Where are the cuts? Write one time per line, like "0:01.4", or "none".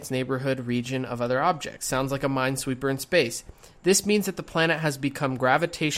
none